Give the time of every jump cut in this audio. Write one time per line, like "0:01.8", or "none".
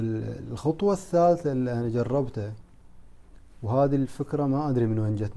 none